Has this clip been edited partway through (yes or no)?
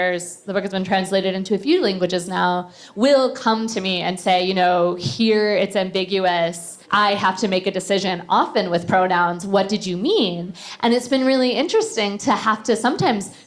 yes